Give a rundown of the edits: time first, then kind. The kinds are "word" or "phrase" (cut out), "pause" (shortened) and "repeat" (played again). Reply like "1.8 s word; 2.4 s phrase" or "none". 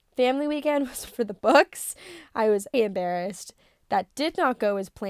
1.1 s word; 2.7 s word